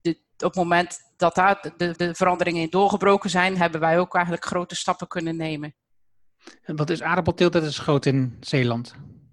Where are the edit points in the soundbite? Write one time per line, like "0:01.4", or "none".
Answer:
0:01.9